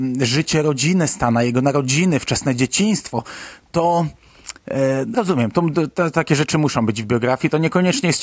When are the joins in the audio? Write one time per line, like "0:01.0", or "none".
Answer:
0:05.1